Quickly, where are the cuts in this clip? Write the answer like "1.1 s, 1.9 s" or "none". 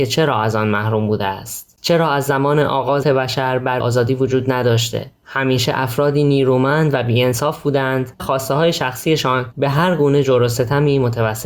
3.0 s, 3.8 s, 8.2 s